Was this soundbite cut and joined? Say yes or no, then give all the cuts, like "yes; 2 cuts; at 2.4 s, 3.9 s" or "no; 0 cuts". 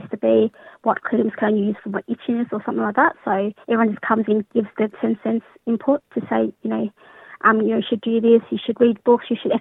yes; 1 cut; at 3.6 s